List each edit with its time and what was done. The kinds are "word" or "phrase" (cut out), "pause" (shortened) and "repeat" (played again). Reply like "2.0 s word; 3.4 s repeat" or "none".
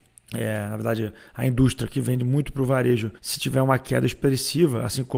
3.2 s pause